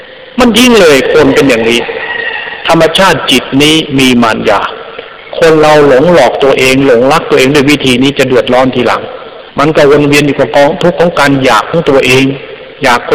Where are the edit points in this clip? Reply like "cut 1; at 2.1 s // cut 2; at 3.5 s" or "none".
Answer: cut 1; at 9.5 s